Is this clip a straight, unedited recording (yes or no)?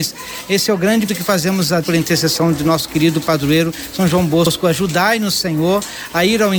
no